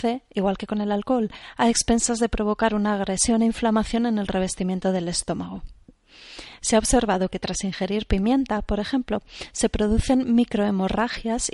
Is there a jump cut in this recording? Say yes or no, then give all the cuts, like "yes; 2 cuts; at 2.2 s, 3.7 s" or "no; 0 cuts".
no; 0 cuts